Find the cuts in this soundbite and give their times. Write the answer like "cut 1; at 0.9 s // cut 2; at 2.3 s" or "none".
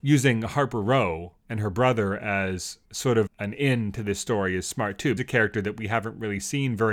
cut 1; at 1.4 s // cut 2; at 2.9 s // cut 3; at 3.3 s // cut 4; at 5.2 s